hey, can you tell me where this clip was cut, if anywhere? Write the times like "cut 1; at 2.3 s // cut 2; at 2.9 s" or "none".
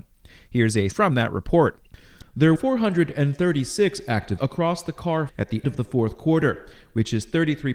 cut 1; at 0.9 s // cut 2; at 2.6 s // cut 3; at 4.4 s // cut 4; at 5.3 s // cut 5; at 5.6 s